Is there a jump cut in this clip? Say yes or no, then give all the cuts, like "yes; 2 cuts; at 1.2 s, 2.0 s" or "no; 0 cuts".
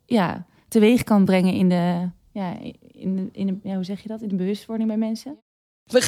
no; 0 cuts